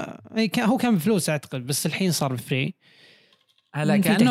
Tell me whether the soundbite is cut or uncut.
uncut